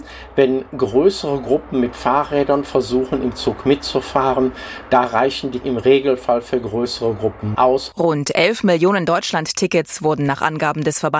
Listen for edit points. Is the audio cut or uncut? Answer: cut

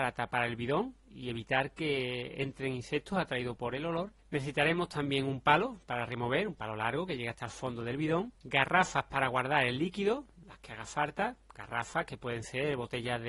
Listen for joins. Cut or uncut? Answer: cut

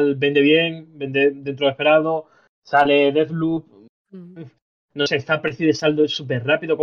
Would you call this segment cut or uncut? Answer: uncut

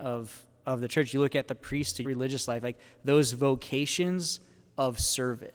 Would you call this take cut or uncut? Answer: cut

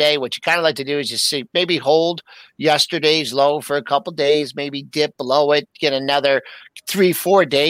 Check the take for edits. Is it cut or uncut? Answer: uncut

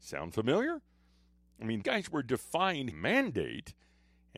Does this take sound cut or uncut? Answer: cut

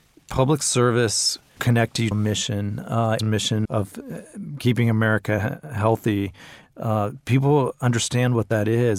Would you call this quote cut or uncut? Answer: cut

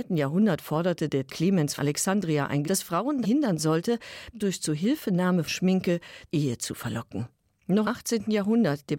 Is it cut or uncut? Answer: cut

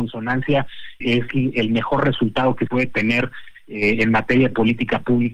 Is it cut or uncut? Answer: cut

